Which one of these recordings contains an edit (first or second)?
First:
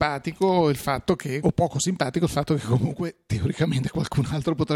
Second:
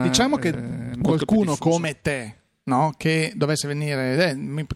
first